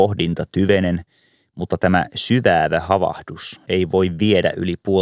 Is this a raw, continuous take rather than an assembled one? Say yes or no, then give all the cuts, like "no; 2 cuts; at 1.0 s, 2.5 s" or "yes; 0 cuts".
yes; 0 cuts